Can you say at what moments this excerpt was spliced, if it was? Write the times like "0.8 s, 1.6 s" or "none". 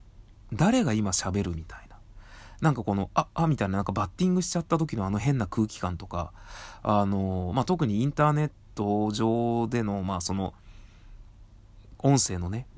none